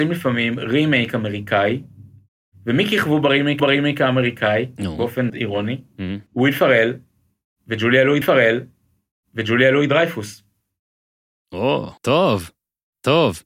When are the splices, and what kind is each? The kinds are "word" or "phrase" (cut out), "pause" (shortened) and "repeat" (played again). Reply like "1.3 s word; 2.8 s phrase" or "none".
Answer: 3.6 s repeat; 5.3 s word; 6.3 s pause; 8.2 s repeat; 12.0 s pause